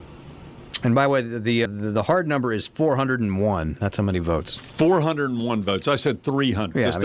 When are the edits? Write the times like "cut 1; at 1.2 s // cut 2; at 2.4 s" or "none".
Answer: cut 1; at 1.6 s